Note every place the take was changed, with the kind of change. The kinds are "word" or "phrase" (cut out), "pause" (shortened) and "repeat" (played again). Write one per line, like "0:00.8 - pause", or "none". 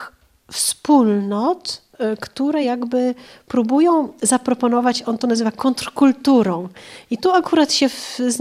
none